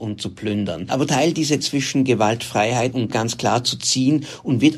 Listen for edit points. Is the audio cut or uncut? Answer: cut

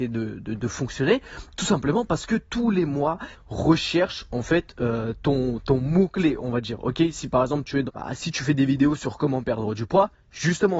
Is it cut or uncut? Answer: cut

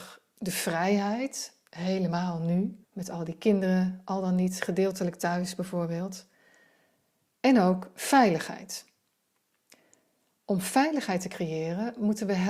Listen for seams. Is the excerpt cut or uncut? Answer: cut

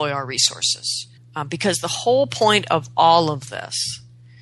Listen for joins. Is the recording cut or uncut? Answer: cut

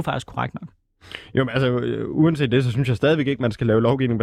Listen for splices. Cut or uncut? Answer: uncut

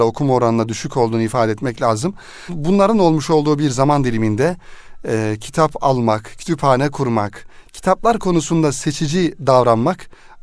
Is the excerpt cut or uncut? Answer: uncut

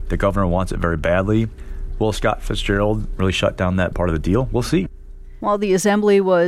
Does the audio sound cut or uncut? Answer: cut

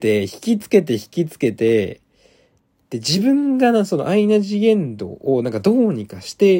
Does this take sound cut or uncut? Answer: uncut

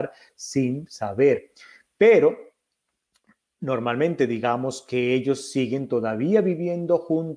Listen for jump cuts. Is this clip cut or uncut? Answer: uncut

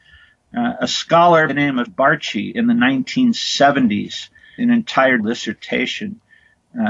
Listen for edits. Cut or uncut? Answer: cut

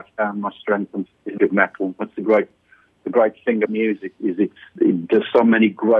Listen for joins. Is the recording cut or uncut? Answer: cut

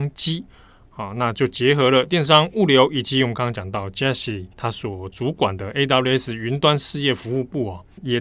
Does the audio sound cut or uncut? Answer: cut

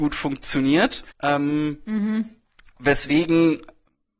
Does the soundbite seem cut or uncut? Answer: cut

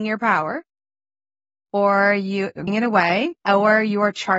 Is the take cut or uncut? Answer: cut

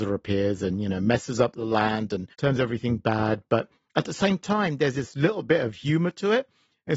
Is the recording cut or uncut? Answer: cut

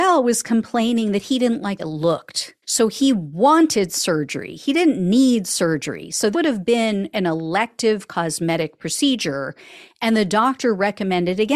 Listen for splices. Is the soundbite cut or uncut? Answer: cut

